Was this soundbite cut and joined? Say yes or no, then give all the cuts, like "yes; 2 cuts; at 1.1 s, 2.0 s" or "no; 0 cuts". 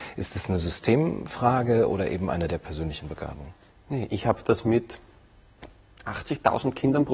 no; 0 cuts